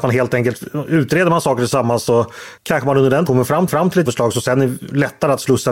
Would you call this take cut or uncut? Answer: cut